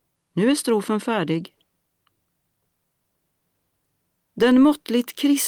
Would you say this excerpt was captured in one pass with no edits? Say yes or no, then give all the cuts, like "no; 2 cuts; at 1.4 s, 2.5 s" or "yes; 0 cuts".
yes; 0 cuts